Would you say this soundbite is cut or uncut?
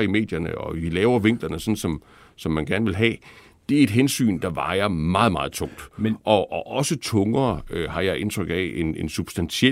uncut